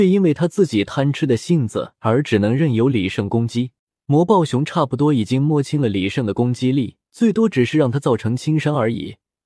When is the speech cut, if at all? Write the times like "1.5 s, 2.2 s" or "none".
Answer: 3.8 s, 7.1 s